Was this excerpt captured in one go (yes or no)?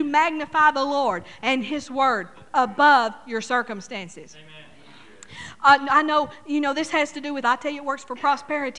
no